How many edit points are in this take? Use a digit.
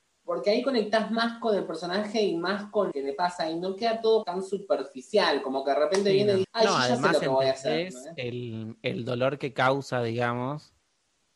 3